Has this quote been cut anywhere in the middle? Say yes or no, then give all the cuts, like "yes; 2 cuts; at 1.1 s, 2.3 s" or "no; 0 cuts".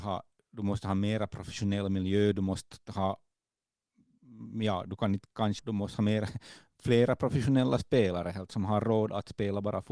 yes; 2 cuts; at 5.6 s, 8.5 s